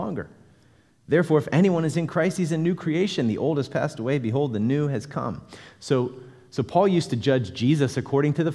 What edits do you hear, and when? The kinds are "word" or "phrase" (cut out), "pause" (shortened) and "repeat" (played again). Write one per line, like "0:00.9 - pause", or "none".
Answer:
none